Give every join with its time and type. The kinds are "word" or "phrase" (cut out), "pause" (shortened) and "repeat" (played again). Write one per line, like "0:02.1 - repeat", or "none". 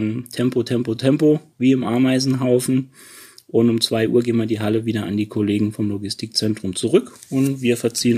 none